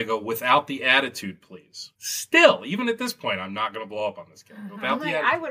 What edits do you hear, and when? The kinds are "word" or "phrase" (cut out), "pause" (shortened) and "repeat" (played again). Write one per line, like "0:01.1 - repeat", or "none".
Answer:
0:02.0 - pause